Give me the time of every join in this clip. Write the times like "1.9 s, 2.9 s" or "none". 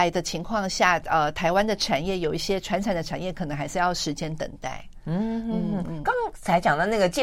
none